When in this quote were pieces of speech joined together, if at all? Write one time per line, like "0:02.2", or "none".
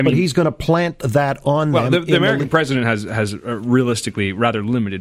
none